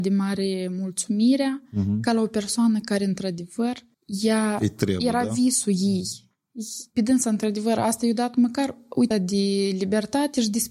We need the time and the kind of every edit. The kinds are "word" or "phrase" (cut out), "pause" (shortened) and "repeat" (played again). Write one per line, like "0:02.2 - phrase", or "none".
0:03.9 - pause
0:09.1 - word

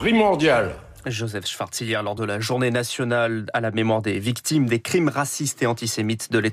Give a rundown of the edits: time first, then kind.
none

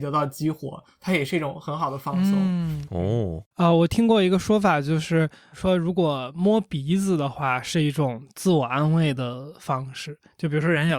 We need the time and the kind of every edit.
0:03.5 - pause

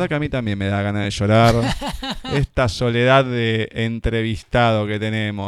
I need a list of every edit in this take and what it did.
none

